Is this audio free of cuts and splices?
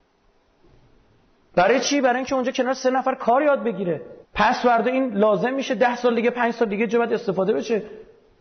no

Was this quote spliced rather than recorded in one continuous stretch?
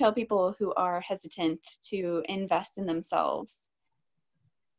no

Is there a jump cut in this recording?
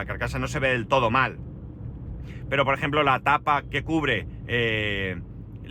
yes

